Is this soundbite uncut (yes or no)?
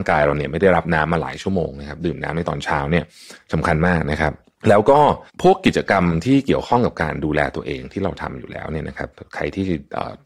no